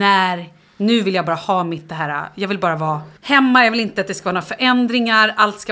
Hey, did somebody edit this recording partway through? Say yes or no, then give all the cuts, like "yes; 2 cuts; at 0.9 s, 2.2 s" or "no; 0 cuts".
yes; 1 cut; at 3.2 s